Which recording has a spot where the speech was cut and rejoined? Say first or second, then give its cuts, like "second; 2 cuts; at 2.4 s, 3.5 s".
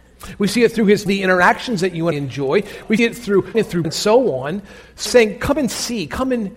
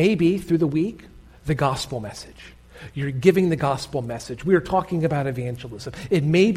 first; 6 cuts; at 1.1 s, 2.1 s, 3.0 s, 3.5 s, 3.8 s, 5.1 s